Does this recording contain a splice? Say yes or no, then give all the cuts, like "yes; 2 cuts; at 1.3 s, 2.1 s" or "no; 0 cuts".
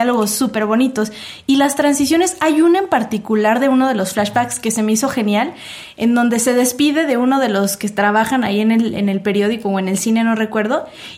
no; 0 cuts